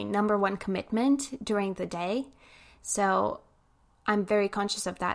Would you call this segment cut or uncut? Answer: uncut